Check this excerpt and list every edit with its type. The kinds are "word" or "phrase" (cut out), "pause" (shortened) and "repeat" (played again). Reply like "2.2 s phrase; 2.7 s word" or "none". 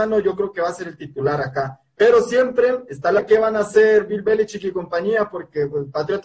3.2 s word